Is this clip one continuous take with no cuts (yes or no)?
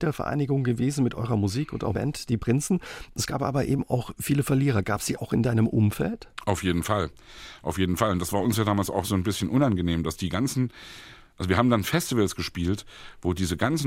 no